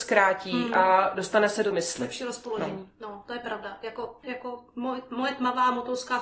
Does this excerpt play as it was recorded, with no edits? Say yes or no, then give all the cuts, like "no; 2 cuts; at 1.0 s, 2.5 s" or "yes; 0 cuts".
no; 2 cuts; at 1.7 s, 4.2 s